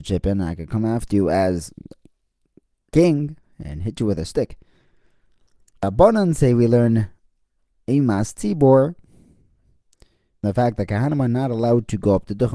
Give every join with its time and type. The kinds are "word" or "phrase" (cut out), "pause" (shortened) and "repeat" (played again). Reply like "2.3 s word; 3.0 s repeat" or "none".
none

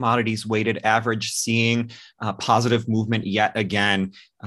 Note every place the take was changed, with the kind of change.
none

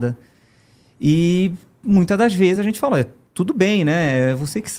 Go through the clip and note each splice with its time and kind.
none

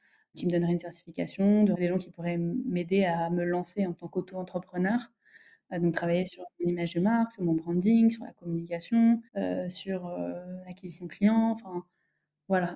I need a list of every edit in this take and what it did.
1.7 s word; 9.3 s pause

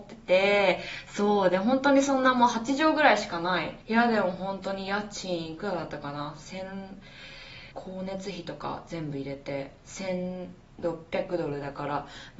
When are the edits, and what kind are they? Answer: 3.8 s pause; 7.7 s pause; 9.8 s pause

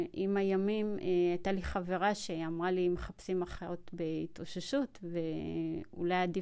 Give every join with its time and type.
none

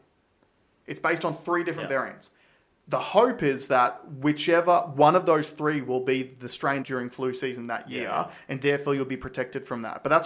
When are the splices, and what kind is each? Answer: 6.8 s phrase

